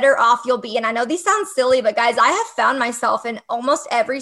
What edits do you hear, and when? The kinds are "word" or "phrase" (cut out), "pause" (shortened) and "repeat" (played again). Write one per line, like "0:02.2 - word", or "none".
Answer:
none